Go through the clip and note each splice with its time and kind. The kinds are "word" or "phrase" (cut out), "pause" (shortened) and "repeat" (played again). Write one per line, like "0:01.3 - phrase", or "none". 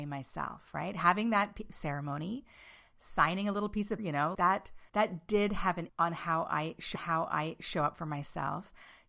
0:04.0 - word
0:04.3 - word
0:04.9 - pause
0:05.9 - word
0:06.9 - repeat